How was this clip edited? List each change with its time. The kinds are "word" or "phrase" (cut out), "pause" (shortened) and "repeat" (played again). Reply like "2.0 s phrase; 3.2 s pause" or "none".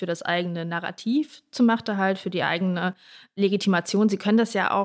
none